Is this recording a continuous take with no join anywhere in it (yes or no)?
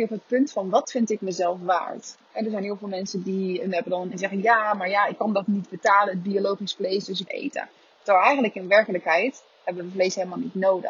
no